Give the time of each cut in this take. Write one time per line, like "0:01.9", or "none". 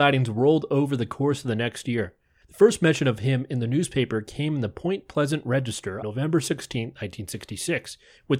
0:06.0

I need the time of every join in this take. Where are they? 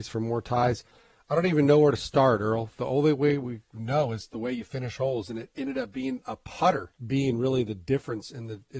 0:07.0

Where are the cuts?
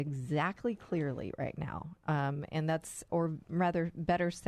0:03.1

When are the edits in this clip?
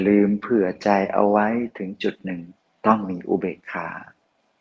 0:02.6

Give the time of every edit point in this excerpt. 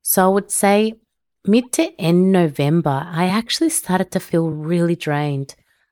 none

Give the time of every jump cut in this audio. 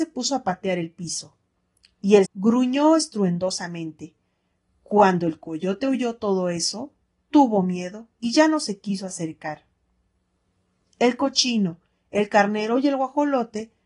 0:02.2

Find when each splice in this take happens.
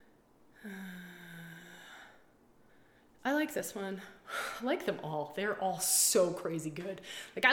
0:02.7

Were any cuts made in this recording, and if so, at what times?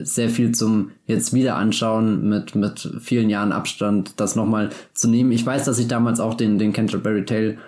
none

